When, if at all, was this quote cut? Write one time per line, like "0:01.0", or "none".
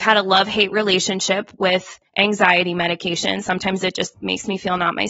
0:02.1